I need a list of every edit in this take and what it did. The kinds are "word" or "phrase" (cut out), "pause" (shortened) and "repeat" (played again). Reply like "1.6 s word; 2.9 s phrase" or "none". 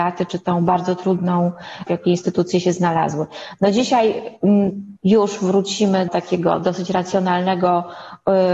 1.9 s word; 5.0 s phrase; 6.1 s word